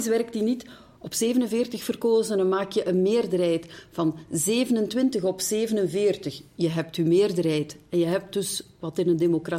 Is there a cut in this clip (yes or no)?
no